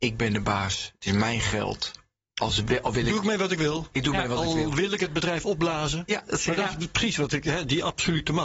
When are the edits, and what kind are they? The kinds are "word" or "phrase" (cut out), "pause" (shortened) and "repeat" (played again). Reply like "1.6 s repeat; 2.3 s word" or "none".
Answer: none

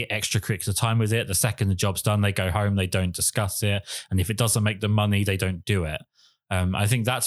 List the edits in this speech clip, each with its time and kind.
none

